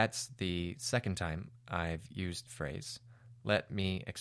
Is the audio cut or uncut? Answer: cut